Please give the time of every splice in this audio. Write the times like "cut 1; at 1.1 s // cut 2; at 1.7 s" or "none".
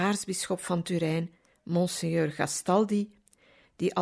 none